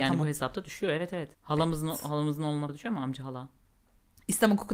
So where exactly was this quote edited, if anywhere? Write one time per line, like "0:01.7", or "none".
0:01.3
0:02.7

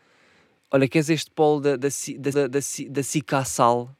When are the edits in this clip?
0:02.3

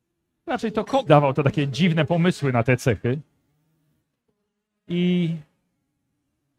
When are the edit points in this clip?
0:01.1

